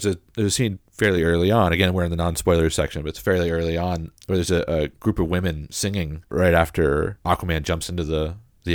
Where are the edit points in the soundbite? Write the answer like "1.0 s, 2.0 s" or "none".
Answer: 4.9 s